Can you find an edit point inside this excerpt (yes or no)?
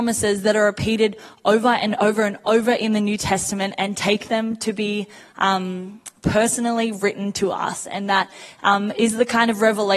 no